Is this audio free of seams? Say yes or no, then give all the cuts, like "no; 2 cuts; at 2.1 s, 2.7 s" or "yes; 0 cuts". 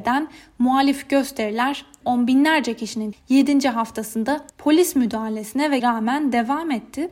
no; 4 cuts; at 2.0 s, 3.1 s, 4.5 s, 5.8 s